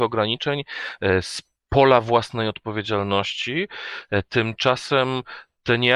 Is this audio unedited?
yes; 0 cuts

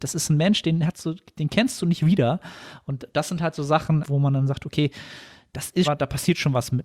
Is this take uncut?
no; 2 cuts; at 4.1 s, 5.8 s

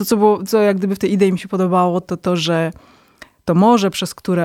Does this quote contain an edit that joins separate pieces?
no; 0 cuts

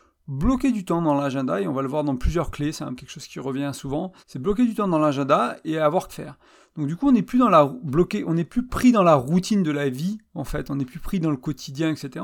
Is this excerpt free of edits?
no; 3 cuts; at 3.0 s, 4.2 s, 6.1 s

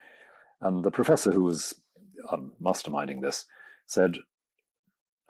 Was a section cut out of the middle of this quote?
no; 0 cuts

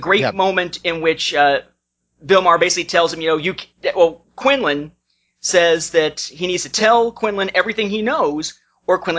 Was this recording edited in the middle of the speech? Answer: no; 0 cuts

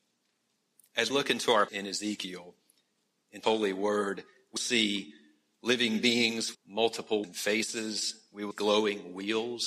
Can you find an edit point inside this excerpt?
yes; 7 cuts; at 1.1 s, 1.7 s, 3.4 s, 4.6 s, 6.5 s, 7.2 s, 8.5 s

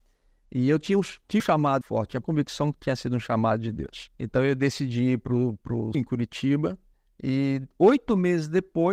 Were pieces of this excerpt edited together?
yes; 6 cuts; at 1.4 s, 1.8 s, 2.2 s, 4.1 s, 5.9 s, 6.9 s

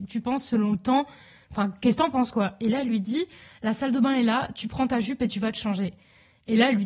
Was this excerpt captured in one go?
yes; 0 cuts

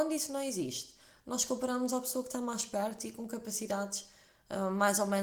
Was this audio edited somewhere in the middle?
no; 0 cuts

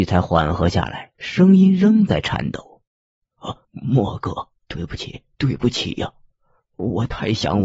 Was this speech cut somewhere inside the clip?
yes; 5 cuts; at 1.1 s, 2.9 s, 3.6 s, 4.6 s, 5.3 s

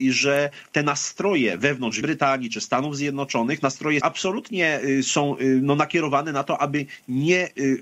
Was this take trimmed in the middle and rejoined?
yes; 2 cuts; at 2.0 s, 4.0 s

